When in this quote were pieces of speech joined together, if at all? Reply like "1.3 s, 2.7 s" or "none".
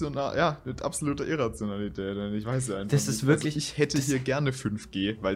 none